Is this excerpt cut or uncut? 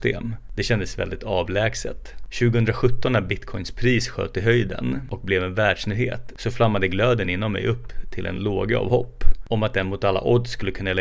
uncut